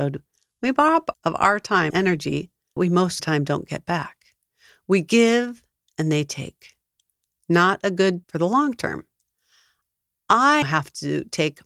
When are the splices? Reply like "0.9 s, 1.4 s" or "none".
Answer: 1.1 s, 1.9 s, 2.8 s, 3.2 s, 8.2 s, 10.6 s